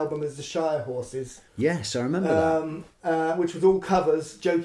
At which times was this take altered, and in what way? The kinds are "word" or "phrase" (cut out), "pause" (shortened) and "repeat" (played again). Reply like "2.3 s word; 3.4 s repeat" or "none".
1.5 s pause; 2.9 s pause